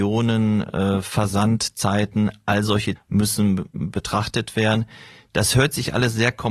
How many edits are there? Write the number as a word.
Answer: one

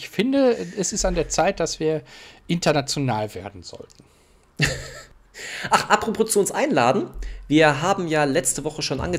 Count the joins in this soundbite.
zero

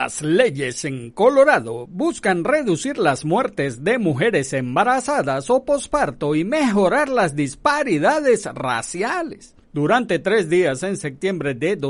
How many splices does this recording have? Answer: one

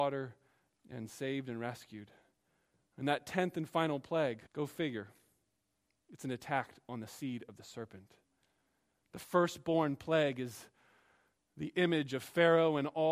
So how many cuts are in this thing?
one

